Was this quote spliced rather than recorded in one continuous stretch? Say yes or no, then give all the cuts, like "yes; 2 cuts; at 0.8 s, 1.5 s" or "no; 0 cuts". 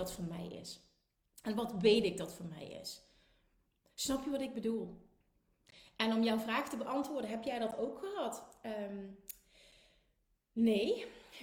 no; 0 cuts